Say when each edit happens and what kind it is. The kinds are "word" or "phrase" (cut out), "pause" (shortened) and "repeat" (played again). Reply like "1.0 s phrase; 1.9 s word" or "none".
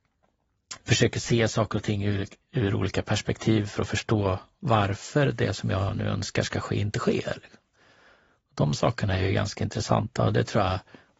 none

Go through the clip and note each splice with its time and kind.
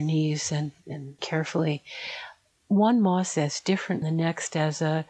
1.2 s word; 3.3 s word; 4.0 s word

